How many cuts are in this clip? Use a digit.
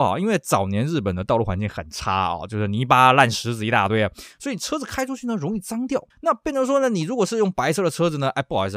1